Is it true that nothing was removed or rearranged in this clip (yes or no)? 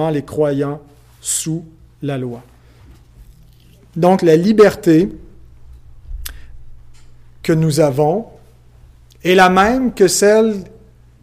yes